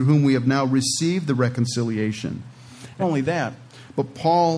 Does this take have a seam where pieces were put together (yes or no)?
yes